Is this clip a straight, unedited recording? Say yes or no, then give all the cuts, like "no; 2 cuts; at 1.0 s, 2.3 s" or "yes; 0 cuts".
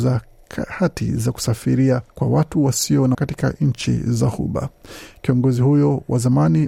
no; 2 cuts; at 2.1 s, 3.1 s